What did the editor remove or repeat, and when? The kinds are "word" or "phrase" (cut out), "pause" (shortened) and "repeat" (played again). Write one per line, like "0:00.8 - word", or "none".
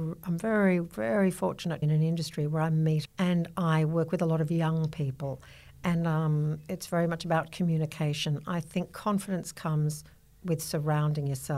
0:01.8 - phrase
0:03.0 - phrase